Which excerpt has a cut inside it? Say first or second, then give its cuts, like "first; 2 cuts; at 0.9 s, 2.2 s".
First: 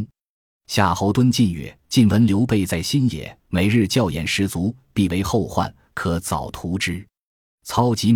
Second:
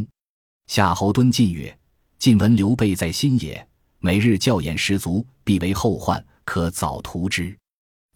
first; 2 cuts; at 1.8 s, 3.4 s